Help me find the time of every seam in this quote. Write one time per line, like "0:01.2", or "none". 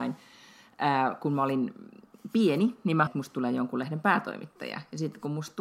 0:03.1